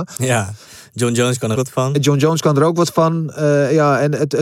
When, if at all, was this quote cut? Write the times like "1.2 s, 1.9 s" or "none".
1.5 s